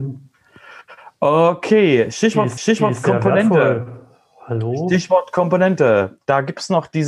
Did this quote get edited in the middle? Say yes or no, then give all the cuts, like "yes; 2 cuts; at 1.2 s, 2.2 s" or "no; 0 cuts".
yes; 1 cut; at 2.6 s